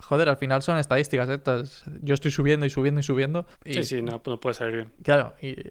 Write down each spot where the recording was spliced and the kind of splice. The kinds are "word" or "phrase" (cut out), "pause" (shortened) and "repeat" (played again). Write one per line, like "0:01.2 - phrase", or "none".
0:03.5 - pause